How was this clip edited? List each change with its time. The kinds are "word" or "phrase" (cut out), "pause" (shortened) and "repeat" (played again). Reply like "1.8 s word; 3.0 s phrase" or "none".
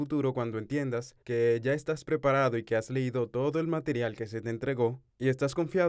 1.2 s pause